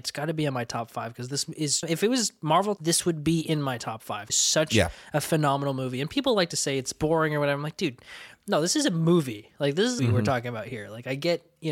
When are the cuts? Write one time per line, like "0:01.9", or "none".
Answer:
0:01.8
0:02.8
0:04.3
0:10.0